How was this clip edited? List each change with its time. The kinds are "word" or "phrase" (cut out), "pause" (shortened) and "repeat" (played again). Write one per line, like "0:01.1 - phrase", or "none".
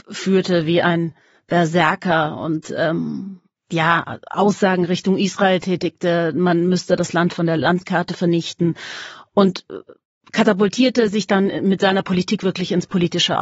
none